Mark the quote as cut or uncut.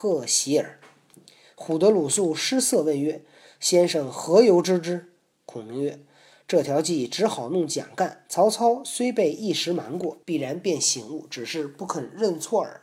cut